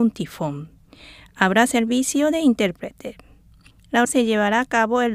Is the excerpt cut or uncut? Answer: cut